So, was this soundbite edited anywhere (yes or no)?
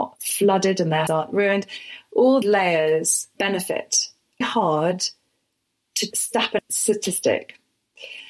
yes